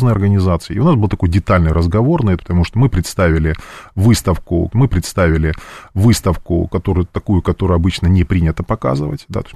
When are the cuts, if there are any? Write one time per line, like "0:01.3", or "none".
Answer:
0:02.4
0:04.7